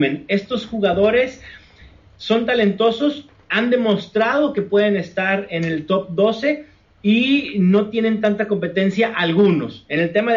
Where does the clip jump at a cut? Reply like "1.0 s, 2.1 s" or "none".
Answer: none